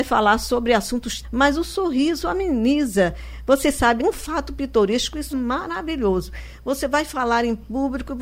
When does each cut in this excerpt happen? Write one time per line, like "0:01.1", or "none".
0:01.2
0:04.0
0:05.3